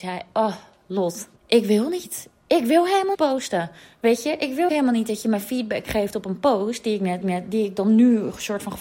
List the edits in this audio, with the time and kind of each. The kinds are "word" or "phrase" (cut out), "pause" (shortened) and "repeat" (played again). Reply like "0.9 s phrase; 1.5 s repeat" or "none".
1.4 s pause; 3.1 s word; 4.7 s word; 7.2 s repeat